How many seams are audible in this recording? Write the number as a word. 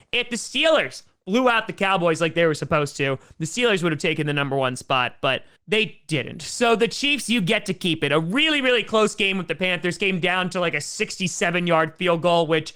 one